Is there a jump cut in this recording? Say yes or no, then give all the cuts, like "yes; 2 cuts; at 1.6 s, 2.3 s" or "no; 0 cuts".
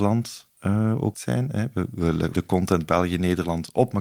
yes; 2 cuts; at 1.1 s, 2.3 s